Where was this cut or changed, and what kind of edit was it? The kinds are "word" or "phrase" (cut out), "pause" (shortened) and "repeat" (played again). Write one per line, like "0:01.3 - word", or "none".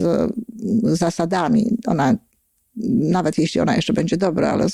none